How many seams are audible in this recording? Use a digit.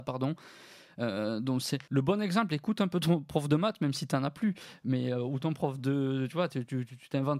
1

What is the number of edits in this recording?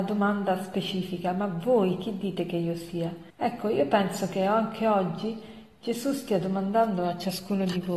1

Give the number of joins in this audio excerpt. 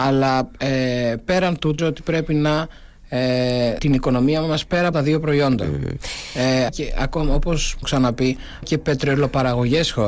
6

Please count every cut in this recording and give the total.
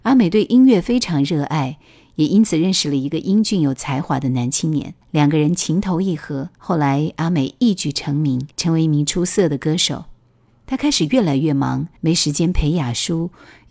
4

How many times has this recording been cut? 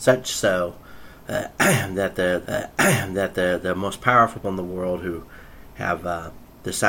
2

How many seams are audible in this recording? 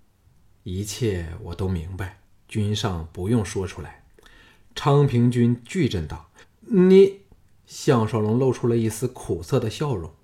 4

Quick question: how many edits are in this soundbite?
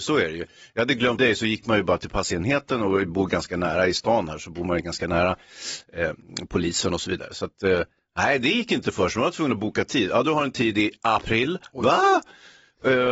1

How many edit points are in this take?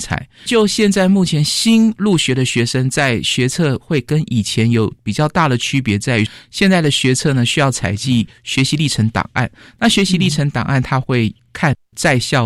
0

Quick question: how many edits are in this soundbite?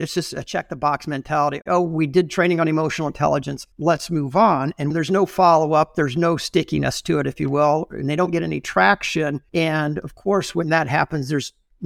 2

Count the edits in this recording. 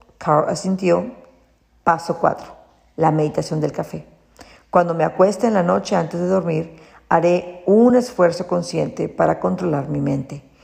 0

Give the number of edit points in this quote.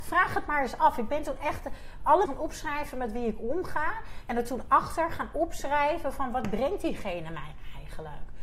1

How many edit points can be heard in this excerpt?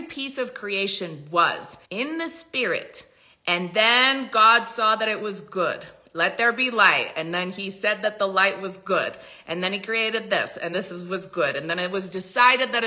2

